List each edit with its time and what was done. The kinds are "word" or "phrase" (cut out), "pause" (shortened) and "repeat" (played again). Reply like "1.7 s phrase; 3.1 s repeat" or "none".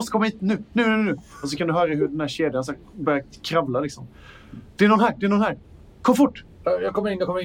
none